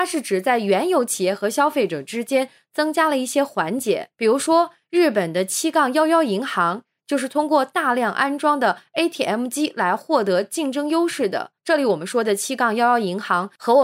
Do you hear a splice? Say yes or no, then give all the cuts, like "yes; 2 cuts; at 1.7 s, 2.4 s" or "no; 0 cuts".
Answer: yes; 2 cuts; at 4.1 s, 11.6 s